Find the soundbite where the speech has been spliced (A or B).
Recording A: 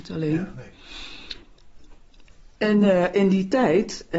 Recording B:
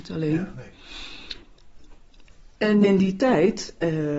B